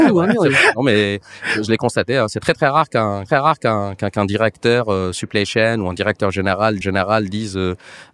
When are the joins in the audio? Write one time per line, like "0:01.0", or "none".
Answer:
0:03.3
0:06.8